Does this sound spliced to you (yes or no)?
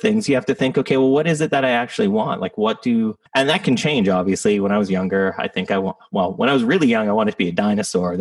yes